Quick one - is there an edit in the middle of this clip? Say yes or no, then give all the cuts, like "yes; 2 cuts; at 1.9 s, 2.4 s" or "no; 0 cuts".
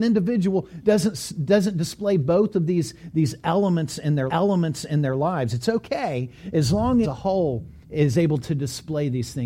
yes; 3 cuts; at 4.3 s, 7.0 s, 7.8 s